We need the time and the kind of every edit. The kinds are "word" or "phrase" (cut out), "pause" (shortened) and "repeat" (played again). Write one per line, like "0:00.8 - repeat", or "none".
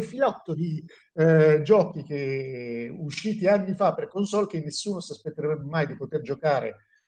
none